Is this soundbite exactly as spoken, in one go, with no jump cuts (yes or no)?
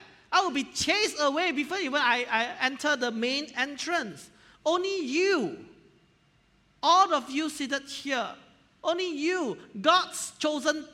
yes